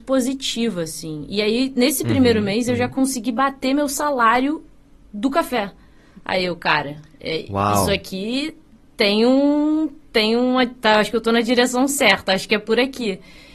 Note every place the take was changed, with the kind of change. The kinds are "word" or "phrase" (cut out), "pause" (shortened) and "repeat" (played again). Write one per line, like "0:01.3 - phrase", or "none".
none